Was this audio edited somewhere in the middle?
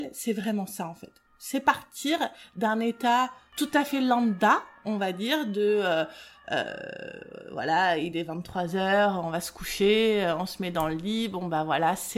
no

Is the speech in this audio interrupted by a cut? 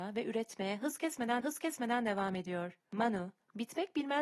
yes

